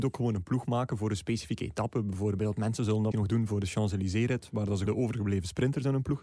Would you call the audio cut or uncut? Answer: cut